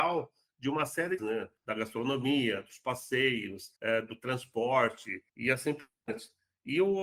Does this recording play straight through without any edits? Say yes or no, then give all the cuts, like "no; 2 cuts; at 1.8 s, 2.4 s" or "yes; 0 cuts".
no; 4 cuts; at 1.2 s, 1.6 s, 3.8 s, 5.3 s